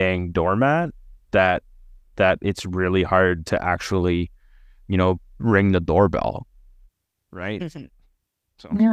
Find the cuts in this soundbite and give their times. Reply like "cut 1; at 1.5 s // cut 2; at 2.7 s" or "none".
none